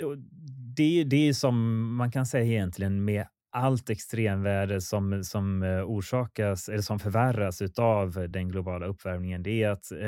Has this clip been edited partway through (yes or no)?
no